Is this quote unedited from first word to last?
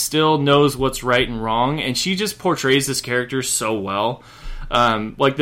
yes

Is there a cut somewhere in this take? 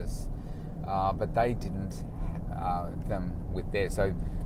yes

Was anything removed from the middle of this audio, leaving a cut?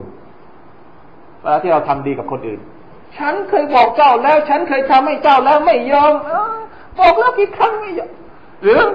no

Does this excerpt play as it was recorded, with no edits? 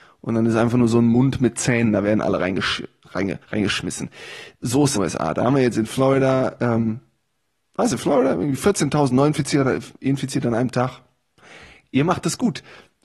no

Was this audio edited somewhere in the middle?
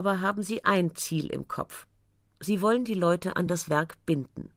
no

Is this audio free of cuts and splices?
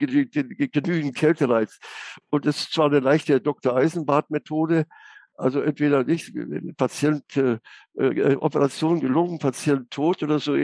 yes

